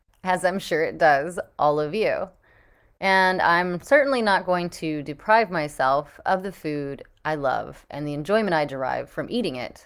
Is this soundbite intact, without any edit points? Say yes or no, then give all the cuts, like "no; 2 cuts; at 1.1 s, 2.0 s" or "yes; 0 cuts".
yes; 0 cuts